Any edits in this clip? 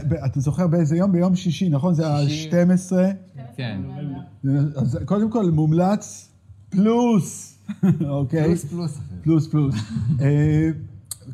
no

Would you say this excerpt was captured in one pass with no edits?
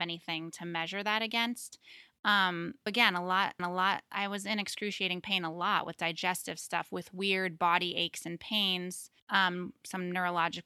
no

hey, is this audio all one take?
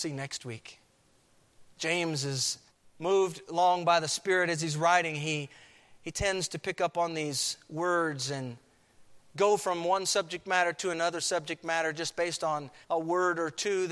no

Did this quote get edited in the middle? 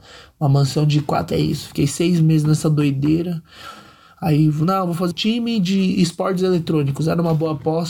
yes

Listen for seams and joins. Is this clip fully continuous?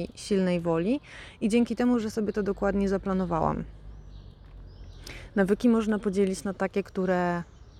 yes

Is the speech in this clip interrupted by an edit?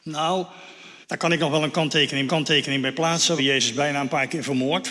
yes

